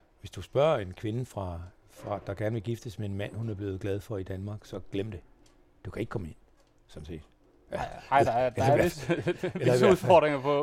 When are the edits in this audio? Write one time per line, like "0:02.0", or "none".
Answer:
none